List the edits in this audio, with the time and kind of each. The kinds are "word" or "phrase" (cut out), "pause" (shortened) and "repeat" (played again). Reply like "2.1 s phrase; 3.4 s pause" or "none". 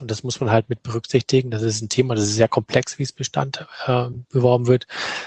none